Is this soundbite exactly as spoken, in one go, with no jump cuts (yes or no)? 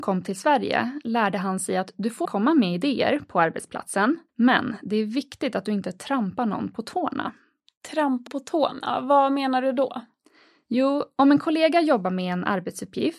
no